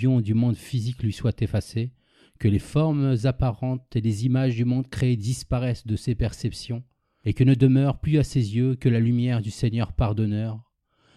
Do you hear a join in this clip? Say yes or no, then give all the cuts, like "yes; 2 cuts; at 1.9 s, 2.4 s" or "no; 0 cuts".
no; 0 cuts